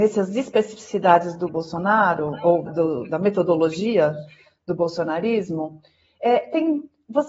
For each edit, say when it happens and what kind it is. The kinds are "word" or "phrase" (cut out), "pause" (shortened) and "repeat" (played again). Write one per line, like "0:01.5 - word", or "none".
0:01.5 - word
0:02.7 - word

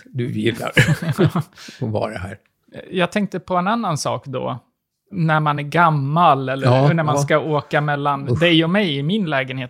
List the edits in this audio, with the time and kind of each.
none

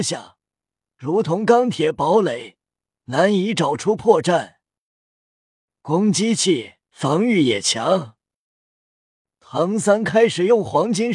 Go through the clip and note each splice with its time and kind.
0:06.8 - pause

